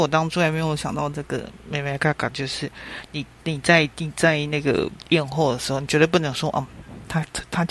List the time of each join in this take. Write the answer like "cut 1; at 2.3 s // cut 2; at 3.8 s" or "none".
cut 1; at 3.9 s